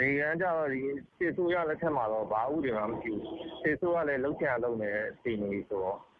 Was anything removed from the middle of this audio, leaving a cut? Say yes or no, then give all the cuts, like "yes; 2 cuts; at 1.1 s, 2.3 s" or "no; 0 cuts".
yes; 1 cut; at 1.1 s